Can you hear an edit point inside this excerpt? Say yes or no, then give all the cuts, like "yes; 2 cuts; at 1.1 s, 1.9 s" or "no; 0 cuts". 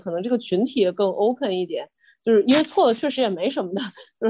no; 0 cuts